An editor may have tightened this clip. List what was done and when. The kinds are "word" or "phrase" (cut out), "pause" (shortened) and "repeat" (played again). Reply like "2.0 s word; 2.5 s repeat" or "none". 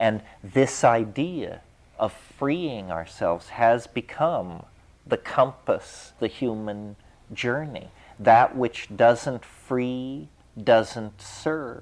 6.2 s word